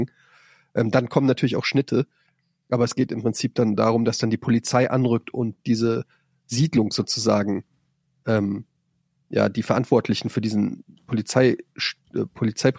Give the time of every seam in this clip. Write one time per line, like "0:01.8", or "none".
none